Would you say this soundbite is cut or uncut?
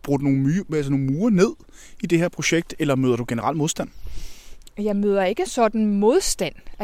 cut